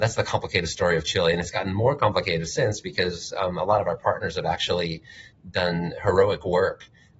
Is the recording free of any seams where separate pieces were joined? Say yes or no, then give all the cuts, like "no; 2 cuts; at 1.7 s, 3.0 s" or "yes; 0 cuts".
yes; 0 cuts